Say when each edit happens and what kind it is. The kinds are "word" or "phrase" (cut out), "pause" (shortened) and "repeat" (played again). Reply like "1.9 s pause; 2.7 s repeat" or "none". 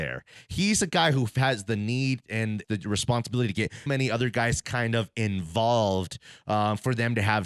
2.6 s word; 3.9 s word